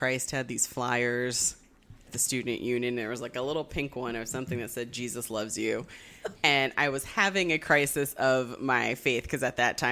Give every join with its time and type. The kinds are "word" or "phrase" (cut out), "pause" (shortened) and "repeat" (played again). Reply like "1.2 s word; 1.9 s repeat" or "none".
2.1 s word